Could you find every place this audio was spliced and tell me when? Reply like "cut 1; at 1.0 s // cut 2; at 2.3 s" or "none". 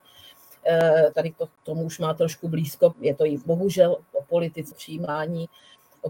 cut 1; at 1.1 s // cut 2; at 2.9 s // cut 3; at 4.0 s // cut 4; at 4.7 s